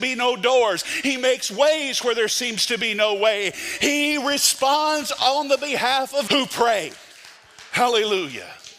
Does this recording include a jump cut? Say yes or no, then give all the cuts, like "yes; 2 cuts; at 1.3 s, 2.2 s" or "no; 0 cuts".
yes; 1 cut; at 6.3 s